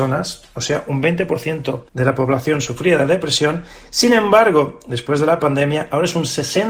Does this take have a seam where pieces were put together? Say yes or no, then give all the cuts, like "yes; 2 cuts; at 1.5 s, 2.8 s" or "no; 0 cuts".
yes; 1 cut; at 1.9 s